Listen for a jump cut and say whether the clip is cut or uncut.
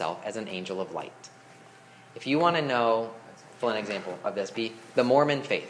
cut